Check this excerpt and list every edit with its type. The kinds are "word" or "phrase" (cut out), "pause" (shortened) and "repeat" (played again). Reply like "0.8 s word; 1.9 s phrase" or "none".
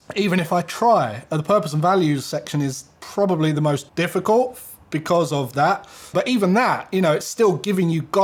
3.9 s pause; 6.1 s word